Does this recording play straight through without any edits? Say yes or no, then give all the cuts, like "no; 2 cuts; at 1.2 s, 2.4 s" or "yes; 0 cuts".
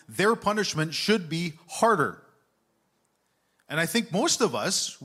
yes; 0 cuts